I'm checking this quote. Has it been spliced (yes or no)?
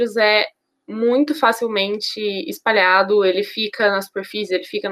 no